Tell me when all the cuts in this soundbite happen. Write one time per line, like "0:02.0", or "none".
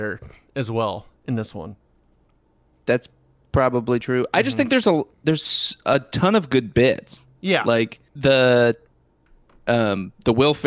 0:01.2
0:08.1